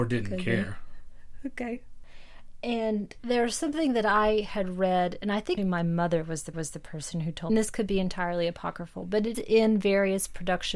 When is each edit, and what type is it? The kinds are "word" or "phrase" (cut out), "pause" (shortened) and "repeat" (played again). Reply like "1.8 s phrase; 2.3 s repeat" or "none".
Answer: 3.2 s word; 5.6 s word; 6.5 s repeat; 7.5 s phrase; 9.3 s word

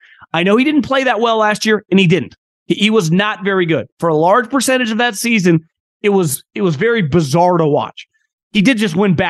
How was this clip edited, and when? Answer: none

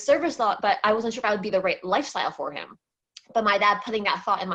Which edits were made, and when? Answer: none

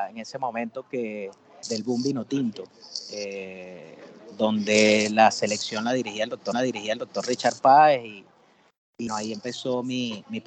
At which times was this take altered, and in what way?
1.6 s word; 6.5 s repeat; 9.1 s word

